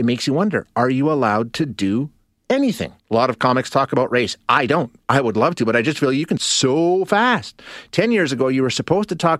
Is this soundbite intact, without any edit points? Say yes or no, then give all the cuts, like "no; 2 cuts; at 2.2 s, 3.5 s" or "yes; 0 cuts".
no; 2 cuts; at 3.0 s, 6.4 s